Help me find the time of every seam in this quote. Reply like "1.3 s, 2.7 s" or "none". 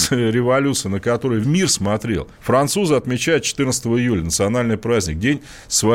1.4 s, 2.4 s